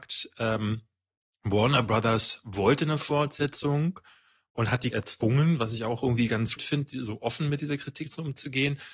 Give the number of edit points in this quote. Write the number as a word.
two